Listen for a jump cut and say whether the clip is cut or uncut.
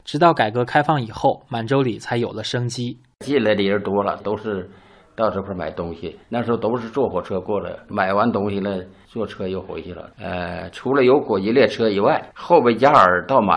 cut